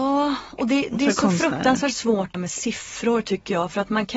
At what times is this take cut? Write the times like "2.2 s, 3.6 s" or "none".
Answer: 2.3 s